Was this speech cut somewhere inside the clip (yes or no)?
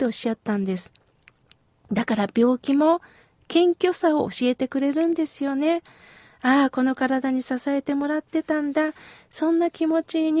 no